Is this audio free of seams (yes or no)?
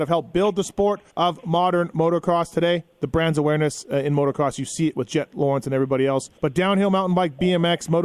no